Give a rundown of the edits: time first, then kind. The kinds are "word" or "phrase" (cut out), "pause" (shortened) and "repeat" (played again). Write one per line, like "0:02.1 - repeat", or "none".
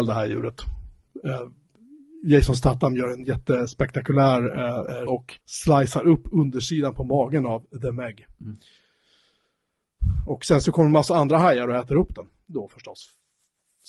0:05.1 - word
0:05.4 - pause